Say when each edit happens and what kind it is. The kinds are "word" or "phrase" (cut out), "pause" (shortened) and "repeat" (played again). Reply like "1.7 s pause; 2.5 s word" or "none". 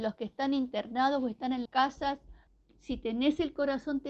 1.7 s word; 2.5 s pause